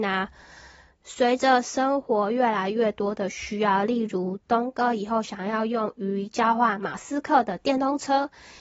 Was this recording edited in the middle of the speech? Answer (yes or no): no